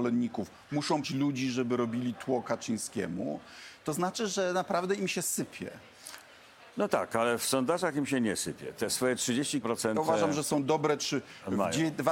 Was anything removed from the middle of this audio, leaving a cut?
yes; 3 cuts; at 1.0 s, 6.7 s, 9.6 s

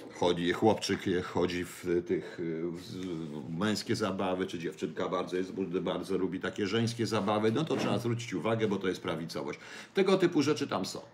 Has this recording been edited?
no; 0 cuts

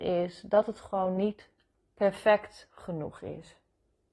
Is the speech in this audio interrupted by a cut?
no; 0 cuts

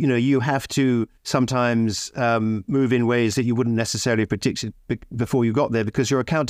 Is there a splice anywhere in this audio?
yes; 1 cut; at 1.2 s

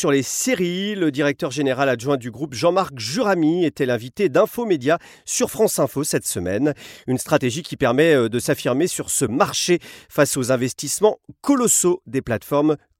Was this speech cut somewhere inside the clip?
no; 0 cuts

